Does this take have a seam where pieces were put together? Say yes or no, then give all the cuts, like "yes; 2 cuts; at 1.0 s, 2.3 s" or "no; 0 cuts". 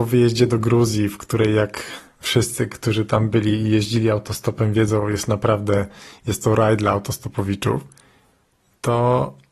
no; 0 cuts